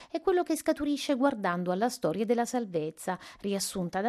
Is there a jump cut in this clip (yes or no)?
no